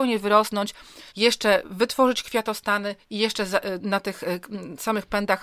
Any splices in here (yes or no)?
yes